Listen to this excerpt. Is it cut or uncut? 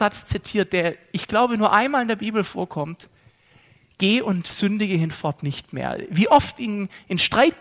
uncut